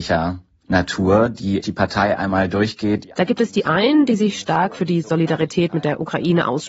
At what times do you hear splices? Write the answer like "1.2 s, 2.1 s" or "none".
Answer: 1.6 s